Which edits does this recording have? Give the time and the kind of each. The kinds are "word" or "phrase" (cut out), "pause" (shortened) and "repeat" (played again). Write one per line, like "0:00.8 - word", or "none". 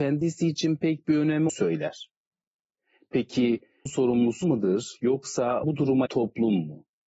0:01.5 - word
0:03.9 - word
0:04.4 - word
0:05.6 - word
0:06.1 - word